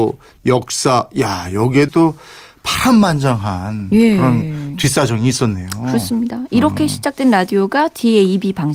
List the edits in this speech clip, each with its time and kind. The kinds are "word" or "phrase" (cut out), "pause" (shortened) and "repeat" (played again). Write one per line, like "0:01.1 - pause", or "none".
0:01.9 - word